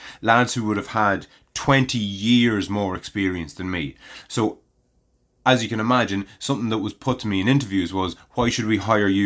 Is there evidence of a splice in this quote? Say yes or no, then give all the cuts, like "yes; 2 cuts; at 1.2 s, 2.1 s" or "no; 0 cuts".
no; 0 cuts